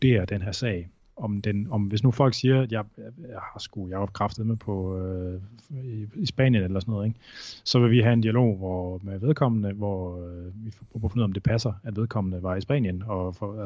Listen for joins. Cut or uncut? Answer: uncut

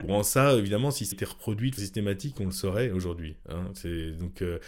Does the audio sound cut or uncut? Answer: cut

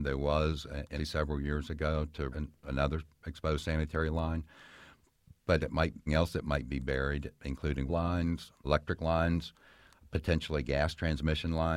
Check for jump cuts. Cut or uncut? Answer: cut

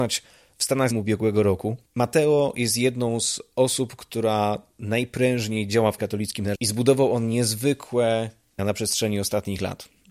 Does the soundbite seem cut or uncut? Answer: cut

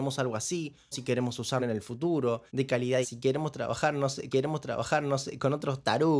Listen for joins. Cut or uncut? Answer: cut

